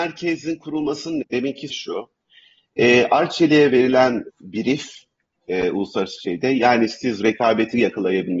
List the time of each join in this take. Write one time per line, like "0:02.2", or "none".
0:01.2
0:01.7
0:04.3